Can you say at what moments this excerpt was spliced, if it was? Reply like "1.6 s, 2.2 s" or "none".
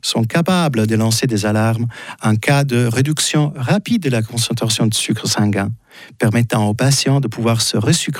none